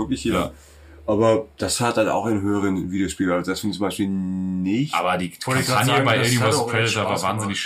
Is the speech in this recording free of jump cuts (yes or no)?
yes